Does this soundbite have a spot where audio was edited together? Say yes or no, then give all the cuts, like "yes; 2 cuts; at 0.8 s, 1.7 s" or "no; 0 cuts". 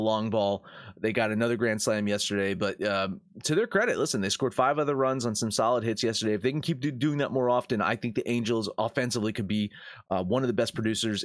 no; 0 cuts